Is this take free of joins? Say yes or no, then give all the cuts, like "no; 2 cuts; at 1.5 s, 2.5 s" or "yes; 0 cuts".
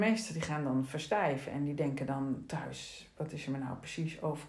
yes; 0 cuts